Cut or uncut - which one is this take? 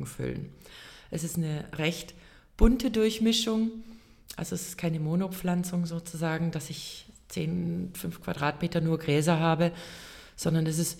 uncut